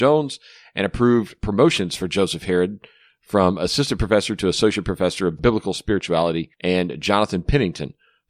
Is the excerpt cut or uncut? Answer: cut